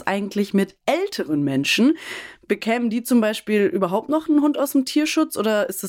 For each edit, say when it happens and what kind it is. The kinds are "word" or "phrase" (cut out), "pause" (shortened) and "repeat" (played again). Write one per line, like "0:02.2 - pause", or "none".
none